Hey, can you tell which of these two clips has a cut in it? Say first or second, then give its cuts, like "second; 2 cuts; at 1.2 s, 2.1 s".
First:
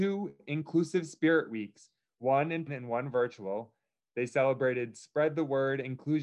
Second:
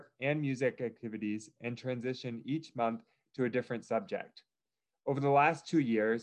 first; 1 cut; at 2.7 s